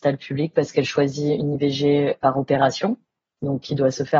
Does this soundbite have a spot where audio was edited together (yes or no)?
no